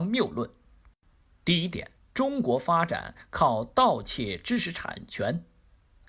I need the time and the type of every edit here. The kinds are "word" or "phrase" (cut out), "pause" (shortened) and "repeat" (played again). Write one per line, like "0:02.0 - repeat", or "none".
0:02.0 - pause